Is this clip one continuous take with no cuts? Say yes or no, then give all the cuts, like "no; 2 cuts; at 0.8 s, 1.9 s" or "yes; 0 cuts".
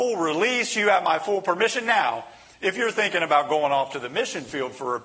yes; 0 cuts